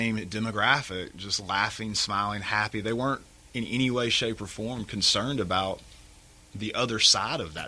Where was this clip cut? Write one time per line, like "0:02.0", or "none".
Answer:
none